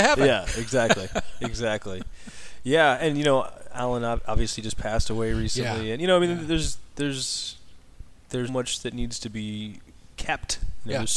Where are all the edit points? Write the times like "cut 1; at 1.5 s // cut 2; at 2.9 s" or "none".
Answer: cut 1; at 8.5 s